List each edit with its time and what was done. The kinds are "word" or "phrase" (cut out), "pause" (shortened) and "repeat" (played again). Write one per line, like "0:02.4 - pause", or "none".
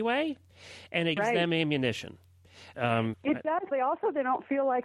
0:01.2 - word
0:02.7 - word
0:03.1 - word
0:03.7 - word